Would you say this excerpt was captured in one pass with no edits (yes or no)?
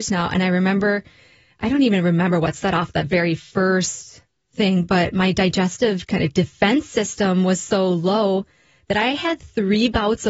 yes